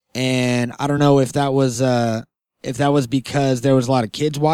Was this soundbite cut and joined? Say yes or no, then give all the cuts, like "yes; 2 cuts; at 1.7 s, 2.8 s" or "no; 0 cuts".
no; 0 cuts